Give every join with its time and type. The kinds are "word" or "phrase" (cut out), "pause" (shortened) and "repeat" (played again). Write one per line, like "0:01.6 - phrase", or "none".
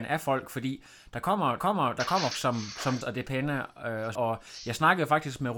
0:01.6 - repeat
0:02.3 - word
0:03.0 - word
0:04.2 - phrase